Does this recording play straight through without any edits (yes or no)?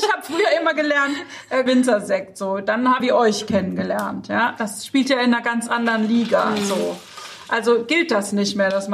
no